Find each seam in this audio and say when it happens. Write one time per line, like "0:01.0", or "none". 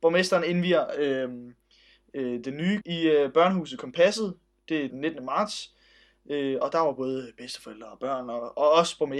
0:02.8
0:04.9